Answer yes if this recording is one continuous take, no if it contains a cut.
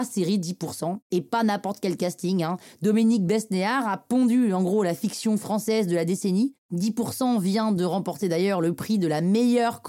yes